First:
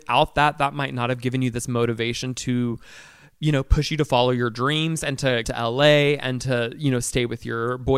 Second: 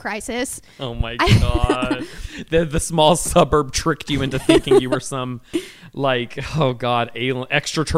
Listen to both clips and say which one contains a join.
first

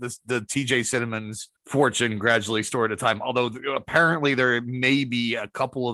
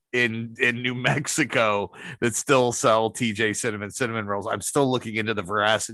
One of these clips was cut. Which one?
first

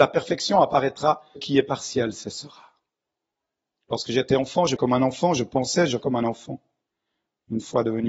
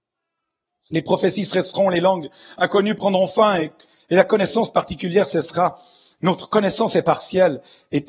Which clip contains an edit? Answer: first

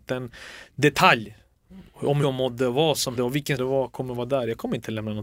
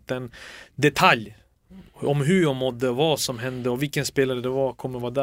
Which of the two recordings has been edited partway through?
first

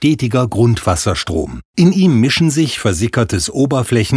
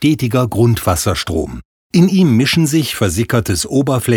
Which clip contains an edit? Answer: first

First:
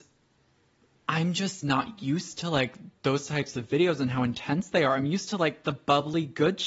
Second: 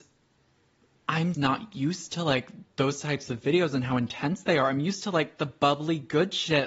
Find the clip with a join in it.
second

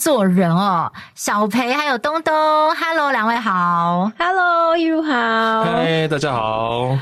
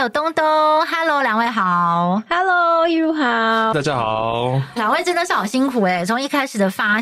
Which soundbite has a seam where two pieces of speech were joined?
second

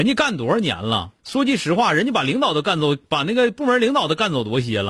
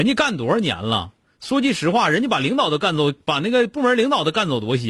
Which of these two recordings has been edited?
first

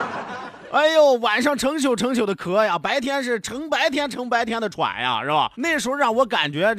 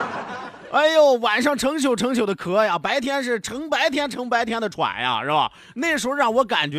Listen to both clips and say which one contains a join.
first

